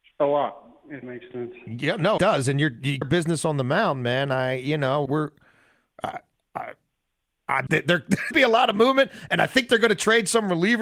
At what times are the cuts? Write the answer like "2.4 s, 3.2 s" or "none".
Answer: 1.0 s, 2.2 s, 3.0 s, 5.1 s, 7.7 s, 8.3 s